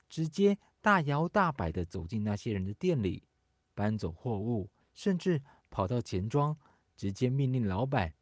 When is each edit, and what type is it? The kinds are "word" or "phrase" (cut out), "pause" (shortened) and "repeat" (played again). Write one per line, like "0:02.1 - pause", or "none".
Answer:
0:04.8 - pause